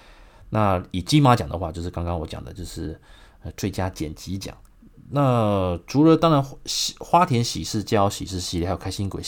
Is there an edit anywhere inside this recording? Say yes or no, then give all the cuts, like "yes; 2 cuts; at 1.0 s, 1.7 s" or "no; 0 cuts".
no; 0 cuts